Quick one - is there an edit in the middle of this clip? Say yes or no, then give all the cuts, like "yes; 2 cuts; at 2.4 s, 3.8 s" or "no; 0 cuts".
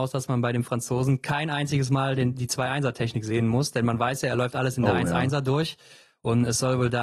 no; 0 cuts